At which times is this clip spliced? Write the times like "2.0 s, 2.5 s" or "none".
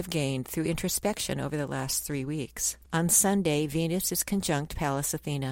2.8 s